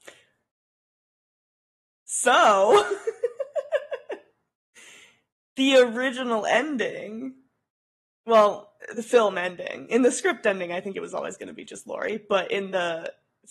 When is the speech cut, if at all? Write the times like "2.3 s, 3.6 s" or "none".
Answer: none